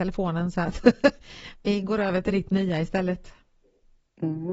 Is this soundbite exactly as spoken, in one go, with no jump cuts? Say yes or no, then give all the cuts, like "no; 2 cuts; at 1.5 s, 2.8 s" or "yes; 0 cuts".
yes; 0 cuts